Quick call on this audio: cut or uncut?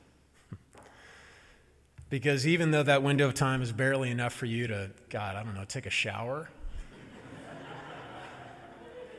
uncut